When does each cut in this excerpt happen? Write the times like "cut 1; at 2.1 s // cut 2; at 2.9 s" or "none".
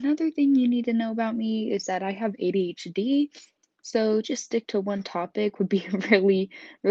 cut 1; at 4.2 s